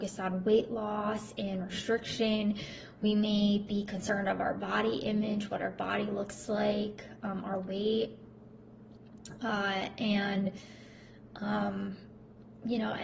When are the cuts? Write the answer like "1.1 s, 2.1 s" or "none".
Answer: none